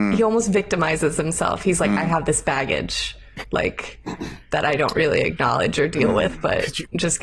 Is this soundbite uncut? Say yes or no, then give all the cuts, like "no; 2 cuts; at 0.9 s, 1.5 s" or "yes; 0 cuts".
yes; 0 cuts